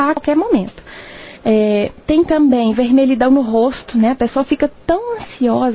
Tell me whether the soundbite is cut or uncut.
uncut